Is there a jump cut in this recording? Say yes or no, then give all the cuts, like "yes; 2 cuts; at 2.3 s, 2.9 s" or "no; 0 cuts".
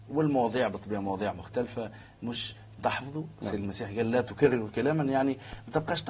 yes; 1 cut; at 2.8 s